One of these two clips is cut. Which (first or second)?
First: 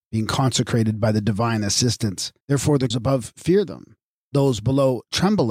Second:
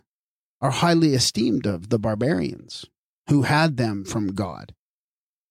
first